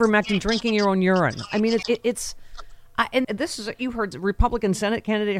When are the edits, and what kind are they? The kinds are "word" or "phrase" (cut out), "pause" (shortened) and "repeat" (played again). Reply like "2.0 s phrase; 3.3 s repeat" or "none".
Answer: 1.8 s word; 3.2 s word; 4.1 s word